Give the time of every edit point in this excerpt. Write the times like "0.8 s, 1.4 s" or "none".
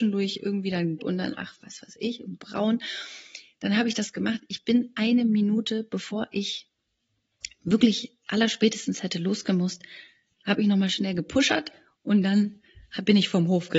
1.0 s